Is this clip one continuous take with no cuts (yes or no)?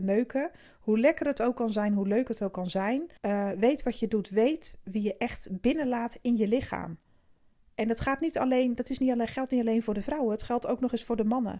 no